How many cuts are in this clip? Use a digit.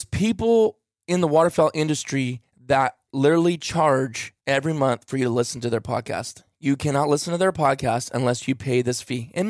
1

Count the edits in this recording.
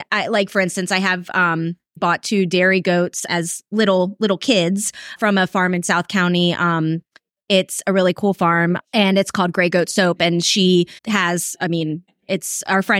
6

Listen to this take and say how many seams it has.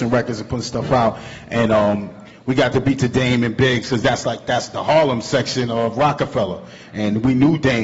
0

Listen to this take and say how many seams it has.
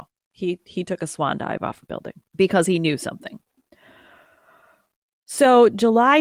1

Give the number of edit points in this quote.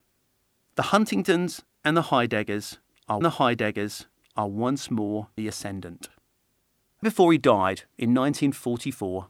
3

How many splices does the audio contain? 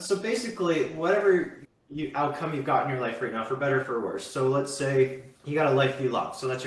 1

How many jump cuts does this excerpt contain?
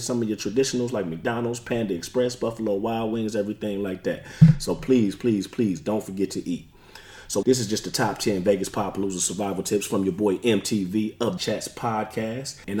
2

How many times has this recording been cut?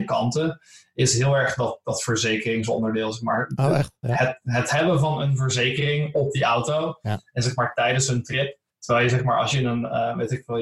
1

